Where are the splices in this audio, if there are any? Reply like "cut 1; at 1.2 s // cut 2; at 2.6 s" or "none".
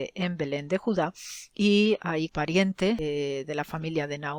cut 1; at 2.3 s